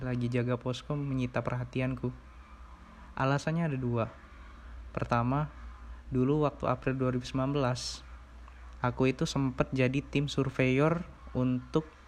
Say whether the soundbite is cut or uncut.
uncut